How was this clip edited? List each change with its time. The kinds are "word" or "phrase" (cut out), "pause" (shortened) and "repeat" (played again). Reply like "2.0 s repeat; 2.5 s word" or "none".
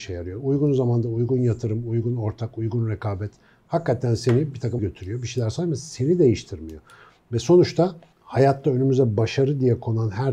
4.8 s word

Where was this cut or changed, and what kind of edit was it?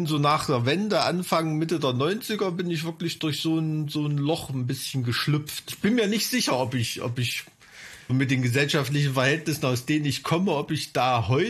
8.1 s word

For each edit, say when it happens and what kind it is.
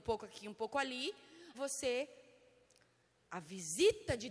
1.5 s word; 3.2 s word

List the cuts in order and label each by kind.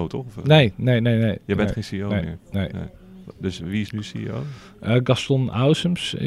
none

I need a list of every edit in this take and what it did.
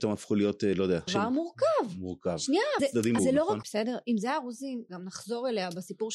1.1 s word; 2.8 s phrase; 3.2 s word; 3.6 s word; 4.9 s word

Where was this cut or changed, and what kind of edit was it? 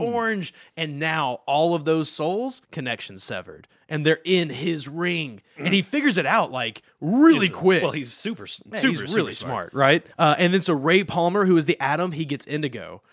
2.6 s pause; 10.1 s pause

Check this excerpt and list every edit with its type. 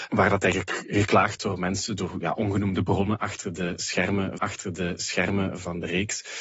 1.4 s word; 4.4 s repeat

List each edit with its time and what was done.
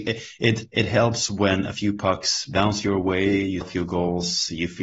3.6 s word

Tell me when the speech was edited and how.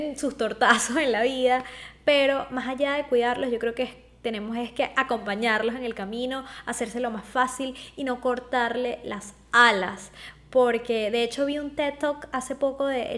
none

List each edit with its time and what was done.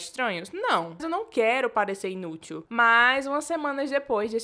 1.0 s word

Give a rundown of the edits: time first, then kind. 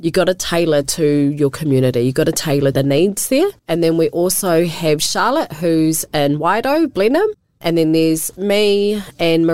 2.7 s phrase; 3.6 s pause

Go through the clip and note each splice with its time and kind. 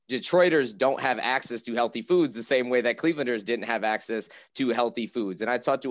none

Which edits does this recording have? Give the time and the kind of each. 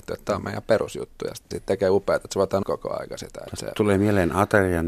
1.5 s word; 2.6 s word

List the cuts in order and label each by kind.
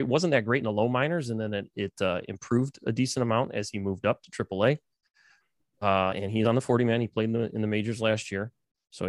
none

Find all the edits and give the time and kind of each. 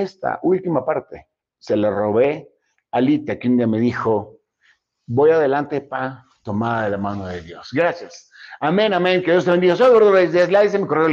none

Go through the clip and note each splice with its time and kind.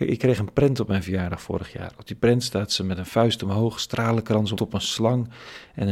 4.6 s phrase

